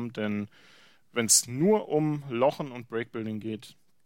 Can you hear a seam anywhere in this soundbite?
no; 0 cuts

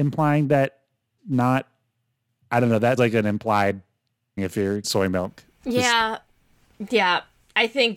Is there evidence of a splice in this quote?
yes; 4 cuts; at 1.2 s, 3.0 s, 4.4 s, 4.8 s

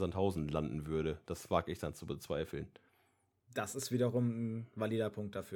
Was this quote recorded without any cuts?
yes; 0 cuts

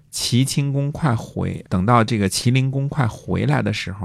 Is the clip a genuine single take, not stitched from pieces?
no; 1 cut; at 1.6 s

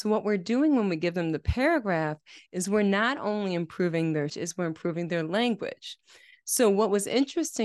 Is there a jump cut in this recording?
yes; 1 cut; at 4.3 s

